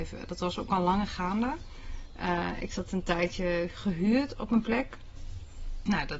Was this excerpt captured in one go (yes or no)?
yes